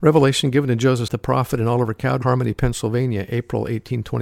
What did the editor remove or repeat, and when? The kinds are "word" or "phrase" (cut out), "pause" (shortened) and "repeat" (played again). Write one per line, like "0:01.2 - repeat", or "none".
0:01.1 - word
0:02.2 - word